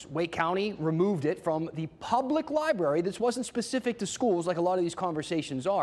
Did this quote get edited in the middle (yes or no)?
no